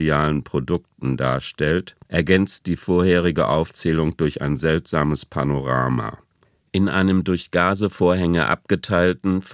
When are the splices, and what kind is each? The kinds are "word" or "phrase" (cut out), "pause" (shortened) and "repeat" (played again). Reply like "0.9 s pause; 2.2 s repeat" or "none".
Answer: 2.0 s pause; 6.4 s pause